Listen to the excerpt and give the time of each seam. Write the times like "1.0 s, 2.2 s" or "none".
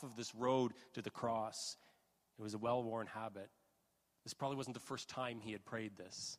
none